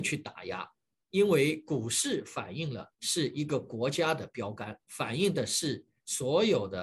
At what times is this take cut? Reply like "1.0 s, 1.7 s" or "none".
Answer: 2.9 s, 4.8 s

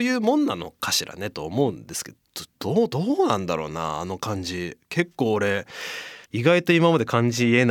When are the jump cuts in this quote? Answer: 6.2 s

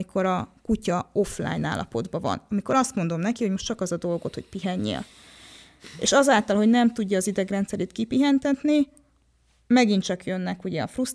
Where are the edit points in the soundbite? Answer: none

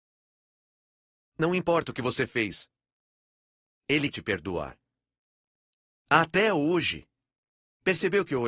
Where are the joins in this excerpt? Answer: 4.1 s

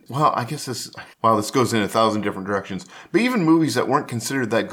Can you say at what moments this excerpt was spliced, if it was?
1.1 s

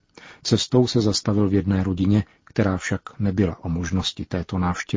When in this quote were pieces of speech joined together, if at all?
none

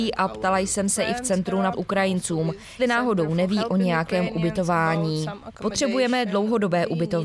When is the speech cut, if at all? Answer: 1.7 s, 2.8 s

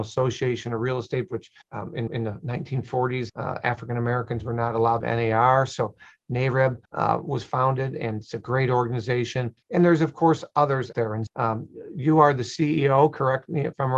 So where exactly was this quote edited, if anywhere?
1.3 s, 1.6 s, 2.1 s, 3.3 s, 5.0 s, 6.9 s, 9.6 s, 10.9 s, 11.3 s

